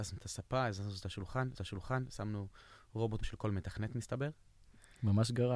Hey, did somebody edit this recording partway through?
yes; 2 cuts; at 1.6 s, 3.2 s

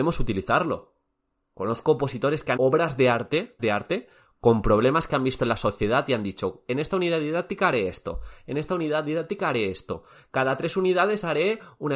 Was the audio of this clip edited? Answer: yes; 2 cuts; at 2.6 s, 3.6 s

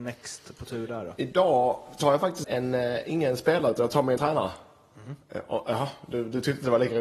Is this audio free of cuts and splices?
no; 2 cuts; at 2.4 s, 4.2 s

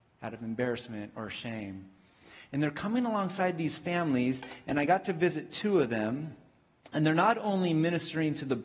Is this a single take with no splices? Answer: yes; 0 cuts

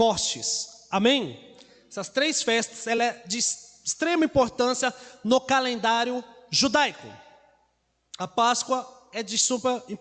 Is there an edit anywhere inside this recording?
no; 0 cuts

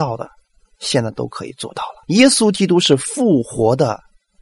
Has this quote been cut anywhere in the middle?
yes; 1 cut; at 2.0 s

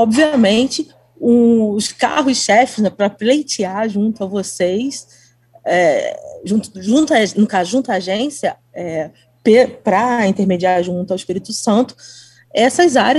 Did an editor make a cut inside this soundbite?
no; 0 cuts

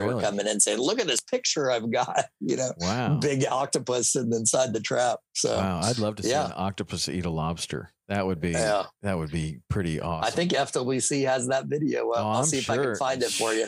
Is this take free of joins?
no; 1 cut; at 8.0 s

